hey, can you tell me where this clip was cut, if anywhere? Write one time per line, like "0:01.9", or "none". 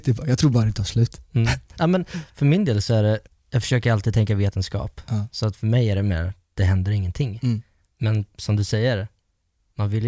none